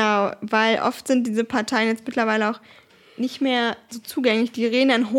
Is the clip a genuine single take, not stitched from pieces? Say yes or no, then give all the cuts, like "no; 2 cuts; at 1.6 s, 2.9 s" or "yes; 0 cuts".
yes; 0 cuts